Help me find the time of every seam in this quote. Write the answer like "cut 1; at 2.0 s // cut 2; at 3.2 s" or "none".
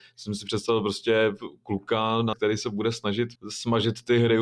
cut 1; at 2.3 s // cut 2; at 3.3 s